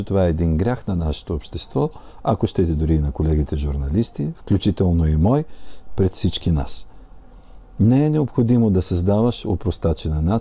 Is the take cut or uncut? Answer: uncut